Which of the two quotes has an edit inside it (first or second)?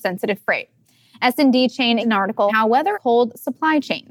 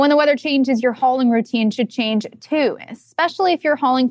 first